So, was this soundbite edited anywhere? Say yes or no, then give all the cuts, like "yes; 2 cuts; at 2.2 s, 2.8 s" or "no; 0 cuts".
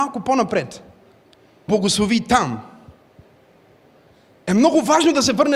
yes; 1 cut; at 1.7 s